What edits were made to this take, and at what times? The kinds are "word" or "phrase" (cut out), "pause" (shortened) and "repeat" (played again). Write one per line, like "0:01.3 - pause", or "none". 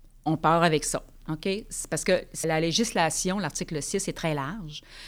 0:02.4 - word